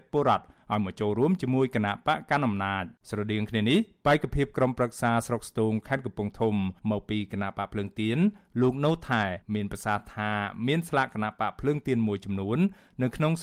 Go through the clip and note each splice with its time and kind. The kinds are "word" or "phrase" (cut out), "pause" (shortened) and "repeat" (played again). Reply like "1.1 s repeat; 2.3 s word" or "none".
3.0 s pause; 6.8 s pause; 9.4 s pause